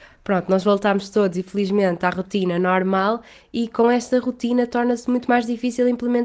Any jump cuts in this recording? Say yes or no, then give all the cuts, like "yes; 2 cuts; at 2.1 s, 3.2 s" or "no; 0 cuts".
no; 0 cuts